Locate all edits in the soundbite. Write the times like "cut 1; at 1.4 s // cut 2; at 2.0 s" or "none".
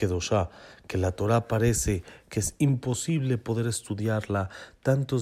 none